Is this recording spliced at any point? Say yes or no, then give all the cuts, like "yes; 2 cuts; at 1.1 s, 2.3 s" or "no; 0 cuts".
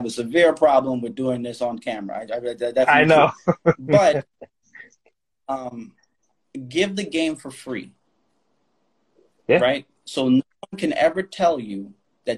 no; 0 cuts